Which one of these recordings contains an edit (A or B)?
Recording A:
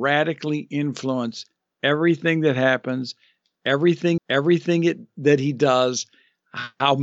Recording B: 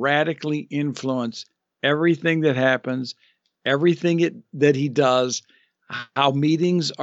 A